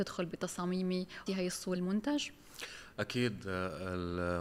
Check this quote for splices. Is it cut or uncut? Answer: cut